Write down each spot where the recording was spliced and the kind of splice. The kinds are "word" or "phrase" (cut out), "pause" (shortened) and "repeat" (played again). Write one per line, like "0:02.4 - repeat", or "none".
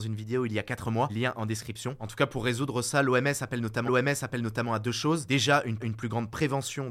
0:01.1 - phrase
0:03.9 - repeat
0:05.8 - repeat